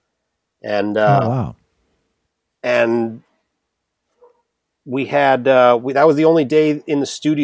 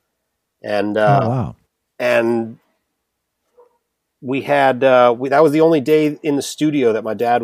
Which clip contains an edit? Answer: second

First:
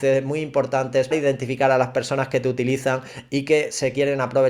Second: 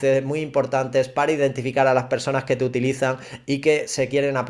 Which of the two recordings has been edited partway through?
first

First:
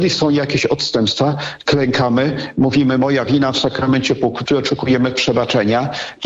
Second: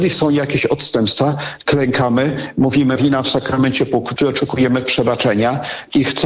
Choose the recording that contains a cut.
second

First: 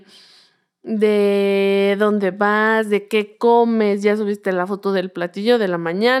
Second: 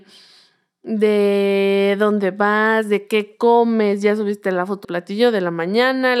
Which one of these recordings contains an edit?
second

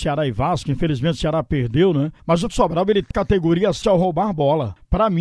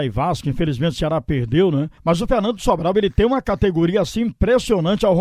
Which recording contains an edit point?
first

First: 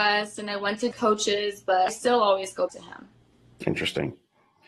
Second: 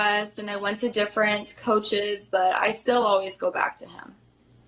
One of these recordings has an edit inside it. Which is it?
first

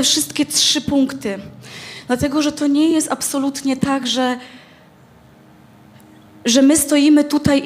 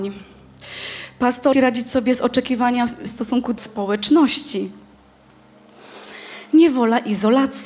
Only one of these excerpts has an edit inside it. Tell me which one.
second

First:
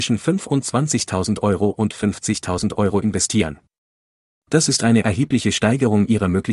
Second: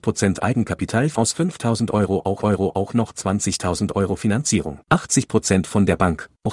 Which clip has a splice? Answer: second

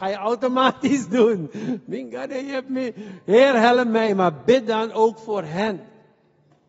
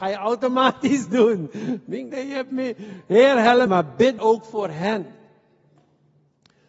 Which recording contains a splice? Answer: second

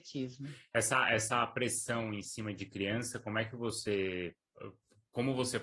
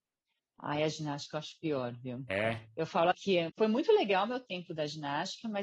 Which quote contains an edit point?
second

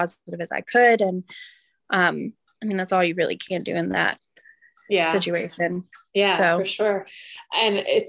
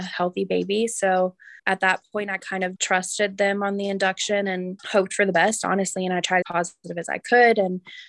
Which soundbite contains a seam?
second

